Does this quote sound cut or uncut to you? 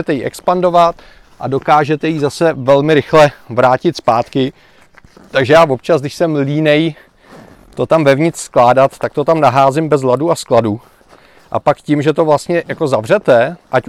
uncut